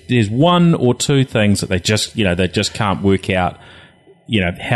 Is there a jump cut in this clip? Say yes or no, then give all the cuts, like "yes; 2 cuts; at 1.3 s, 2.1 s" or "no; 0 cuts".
no; 0 cuts